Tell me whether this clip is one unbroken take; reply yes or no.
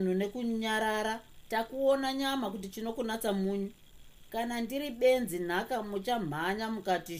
no